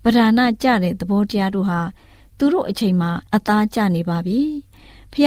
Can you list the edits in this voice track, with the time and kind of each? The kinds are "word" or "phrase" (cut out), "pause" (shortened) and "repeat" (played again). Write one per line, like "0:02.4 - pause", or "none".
0:03.3 - pause